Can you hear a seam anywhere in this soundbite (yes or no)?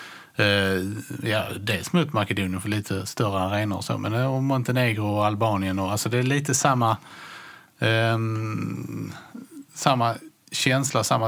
yes